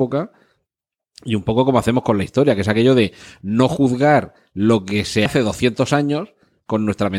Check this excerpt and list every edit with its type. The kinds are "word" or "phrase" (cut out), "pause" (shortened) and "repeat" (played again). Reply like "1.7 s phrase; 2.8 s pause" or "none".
5.3 s word